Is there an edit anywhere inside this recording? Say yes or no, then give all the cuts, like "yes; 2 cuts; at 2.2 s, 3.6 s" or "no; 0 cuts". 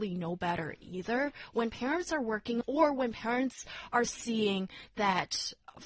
yes; 1 cut; at 2.6 s